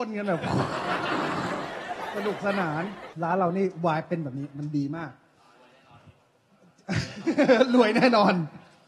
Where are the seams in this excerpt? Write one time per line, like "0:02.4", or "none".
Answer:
0:03.1